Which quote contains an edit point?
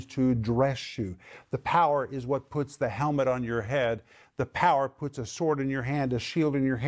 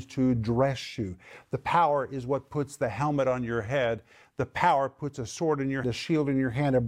second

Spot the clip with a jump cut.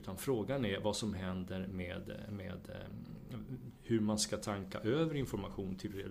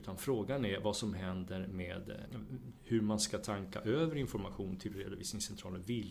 second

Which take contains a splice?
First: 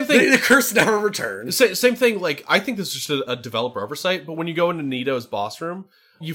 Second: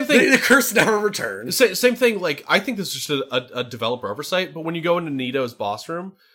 first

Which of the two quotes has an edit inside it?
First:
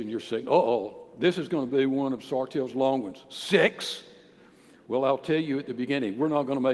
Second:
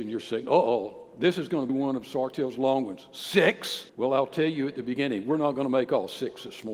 second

